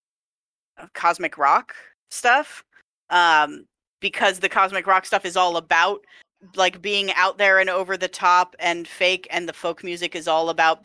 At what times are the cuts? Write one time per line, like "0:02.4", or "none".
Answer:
none